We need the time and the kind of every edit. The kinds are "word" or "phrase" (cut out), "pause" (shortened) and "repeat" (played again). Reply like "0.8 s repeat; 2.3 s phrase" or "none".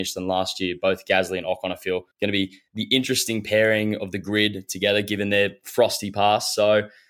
2.1 s pause